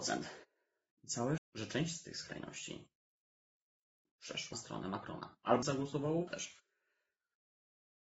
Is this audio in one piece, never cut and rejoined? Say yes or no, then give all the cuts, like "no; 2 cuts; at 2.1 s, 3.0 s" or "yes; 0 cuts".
no; 4 cuts; at 1.4 s, 4.5 s, 5.6 s, 6.3 s